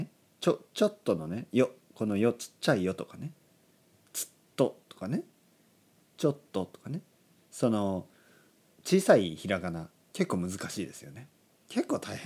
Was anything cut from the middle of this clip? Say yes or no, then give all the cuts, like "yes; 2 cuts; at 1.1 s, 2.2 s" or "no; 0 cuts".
no; 0 cuts